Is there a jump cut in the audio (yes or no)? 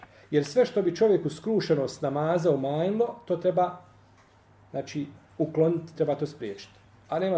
no